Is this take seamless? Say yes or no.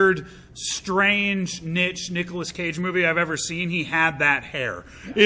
yes